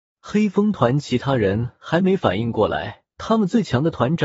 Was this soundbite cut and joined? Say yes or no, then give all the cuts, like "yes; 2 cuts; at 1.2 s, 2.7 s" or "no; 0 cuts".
yes; 1 cut; at 3.1 s